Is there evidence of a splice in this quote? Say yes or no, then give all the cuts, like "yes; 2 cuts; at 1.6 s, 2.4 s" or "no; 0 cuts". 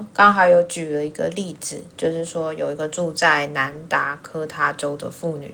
yes; 1 cut; at 1.9 s